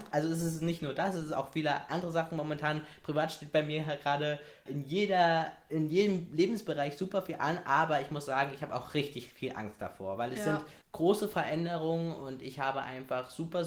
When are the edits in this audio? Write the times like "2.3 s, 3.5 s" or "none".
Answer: 4.7 s, 10.8 s